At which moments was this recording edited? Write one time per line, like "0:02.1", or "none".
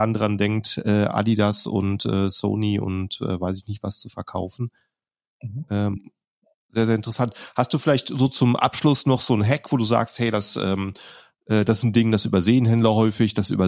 none